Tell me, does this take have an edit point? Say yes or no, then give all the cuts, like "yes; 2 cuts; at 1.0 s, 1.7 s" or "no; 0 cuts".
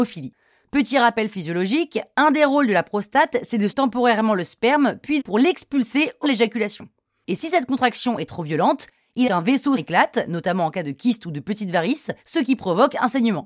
yes; 6 cuts; at 3.7 s, 5.2 s, 6.2 s, 9.2 s, 9.8 s, 12.2 s